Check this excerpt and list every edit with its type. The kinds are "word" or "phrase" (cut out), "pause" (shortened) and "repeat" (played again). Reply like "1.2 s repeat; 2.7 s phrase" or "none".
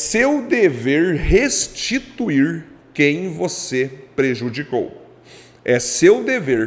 none